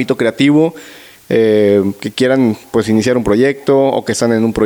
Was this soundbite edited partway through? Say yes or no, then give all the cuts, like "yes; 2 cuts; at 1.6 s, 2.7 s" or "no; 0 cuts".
no; 0 cuts